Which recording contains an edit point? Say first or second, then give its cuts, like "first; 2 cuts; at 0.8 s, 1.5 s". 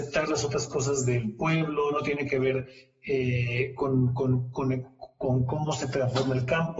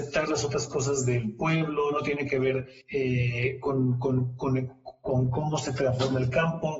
second; 1 cut; at 2.8 s